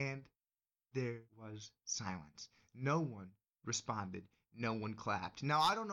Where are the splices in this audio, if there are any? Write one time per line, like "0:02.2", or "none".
0:01.3

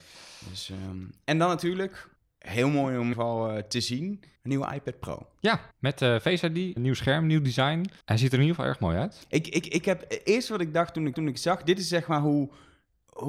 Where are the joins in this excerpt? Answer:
0:02.2
0:03.1
0:04.4
0:05.7
0:06.8
0:08.0
0:09.6
0:11.1

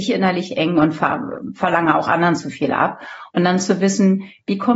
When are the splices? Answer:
none

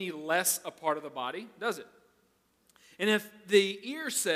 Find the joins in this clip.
none

